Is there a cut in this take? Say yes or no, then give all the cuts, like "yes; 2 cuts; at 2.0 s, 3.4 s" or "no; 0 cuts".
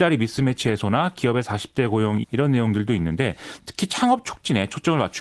yes; 1 cut; at 2.2 s